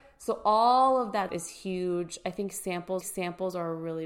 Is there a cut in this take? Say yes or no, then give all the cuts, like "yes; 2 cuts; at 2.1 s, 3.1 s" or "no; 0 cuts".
yes; 2 cuts; at 1.3 s, 3.0 s